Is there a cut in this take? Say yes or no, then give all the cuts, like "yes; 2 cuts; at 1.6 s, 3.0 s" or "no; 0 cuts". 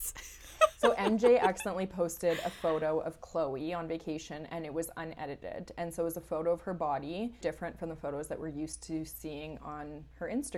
yes; 1 cut; at 7.4 s